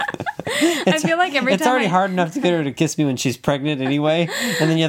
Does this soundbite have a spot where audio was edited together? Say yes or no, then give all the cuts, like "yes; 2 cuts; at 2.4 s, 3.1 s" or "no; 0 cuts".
no; 0 cuts